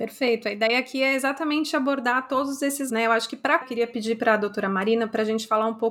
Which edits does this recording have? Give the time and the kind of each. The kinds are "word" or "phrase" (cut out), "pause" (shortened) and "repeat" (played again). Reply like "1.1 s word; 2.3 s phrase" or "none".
2.9 s word; 3.6 s word